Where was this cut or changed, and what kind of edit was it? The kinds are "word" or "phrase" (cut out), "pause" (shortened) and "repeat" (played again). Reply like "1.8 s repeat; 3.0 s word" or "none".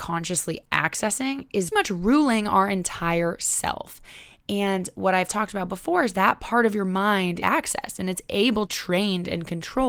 1.7 s word; 6.1 s word; 7.4 s phrase; 8.7 s phrase